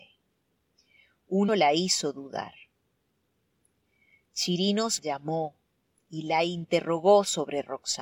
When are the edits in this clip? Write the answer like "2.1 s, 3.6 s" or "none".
1.5 s, 5.0 s